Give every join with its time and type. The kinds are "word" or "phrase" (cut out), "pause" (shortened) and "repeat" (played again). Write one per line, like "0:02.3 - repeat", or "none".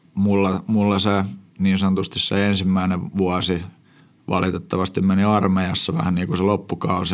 0:01.5 - pause
0:04.0 - pause